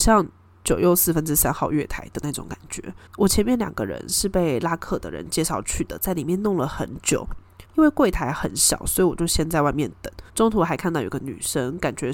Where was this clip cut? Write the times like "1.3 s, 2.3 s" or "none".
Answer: 3.1 s, 7.7 s, 10.3 s